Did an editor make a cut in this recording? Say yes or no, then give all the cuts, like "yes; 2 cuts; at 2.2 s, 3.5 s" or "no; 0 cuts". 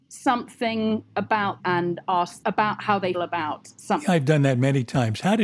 yes; 3 cuts; at 1.6 s, 2.4 s, 3.1 s